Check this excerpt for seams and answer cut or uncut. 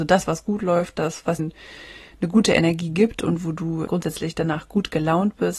cut